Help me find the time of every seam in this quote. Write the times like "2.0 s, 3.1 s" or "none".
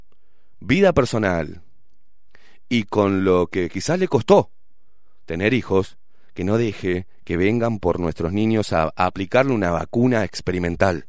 none